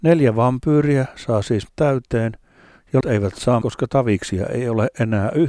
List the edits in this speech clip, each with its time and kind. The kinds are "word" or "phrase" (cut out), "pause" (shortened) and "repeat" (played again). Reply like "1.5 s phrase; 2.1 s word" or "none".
1.7 s word; 3.0 s word; 3.6 s word